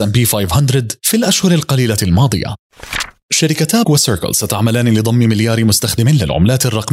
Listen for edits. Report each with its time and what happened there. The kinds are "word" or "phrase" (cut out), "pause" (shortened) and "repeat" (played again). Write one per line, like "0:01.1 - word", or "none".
0:03.8 - word